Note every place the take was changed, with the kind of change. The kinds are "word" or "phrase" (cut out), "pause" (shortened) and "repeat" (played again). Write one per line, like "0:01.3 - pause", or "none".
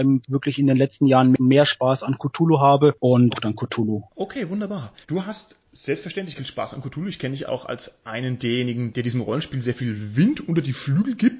0:03.3 - phrase
0:05.0 - pause
0:06.3 - word
0:07.5 - word